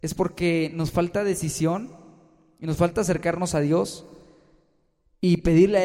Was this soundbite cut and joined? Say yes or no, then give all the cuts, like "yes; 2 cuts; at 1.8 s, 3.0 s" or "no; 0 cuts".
no; 0 cuts